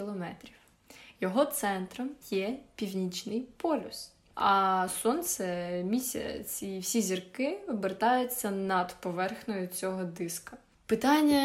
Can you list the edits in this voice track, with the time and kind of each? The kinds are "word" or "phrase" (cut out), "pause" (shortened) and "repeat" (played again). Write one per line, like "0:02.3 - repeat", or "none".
0:02.2 - pause